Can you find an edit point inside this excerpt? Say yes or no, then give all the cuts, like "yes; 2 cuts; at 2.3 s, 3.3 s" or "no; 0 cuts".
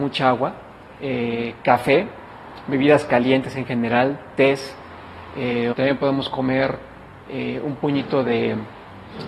yes; 1 cut; at 5.7 s